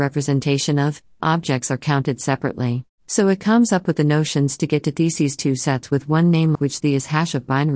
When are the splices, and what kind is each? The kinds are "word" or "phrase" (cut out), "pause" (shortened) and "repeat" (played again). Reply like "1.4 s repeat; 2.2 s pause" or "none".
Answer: 1.2 s word; 2.9 s pause; 6.5 s word

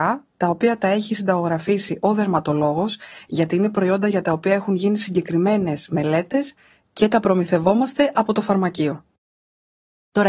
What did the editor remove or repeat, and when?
none

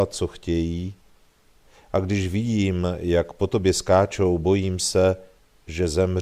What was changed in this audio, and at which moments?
none

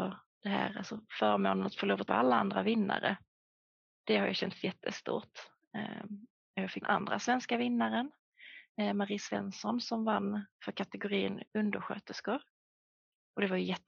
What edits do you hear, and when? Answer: 2.1 s word; 6.8 s phrase; 10.5 s pause; 11.5 s pause

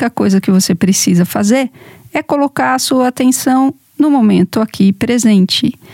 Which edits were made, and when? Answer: none

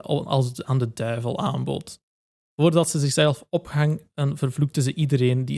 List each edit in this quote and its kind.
none

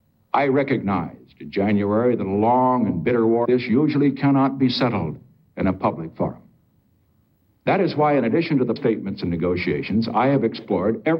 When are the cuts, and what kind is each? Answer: 3.4 s word; 8.8 s word

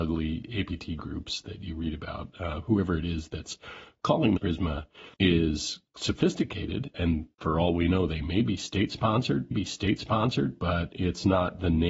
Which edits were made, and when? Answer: 4.4 s word; 5.1 s pause; 6.9 s word; 7.3 s pause; 9.5 s repeat

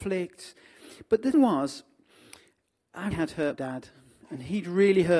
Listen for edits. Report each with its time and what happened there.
1.3 s word; 3.1 s word; 3.5 s word

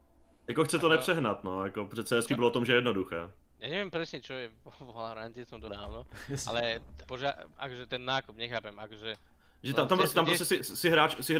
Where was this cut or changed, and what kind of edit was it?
2.3 s word; 5.7 s word; 7.0 s word; 7.5 s pause

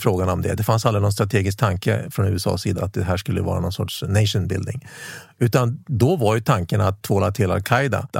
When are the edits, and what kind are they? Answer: 2.8 s word

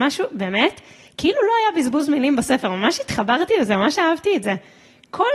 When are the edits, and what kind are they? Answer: none

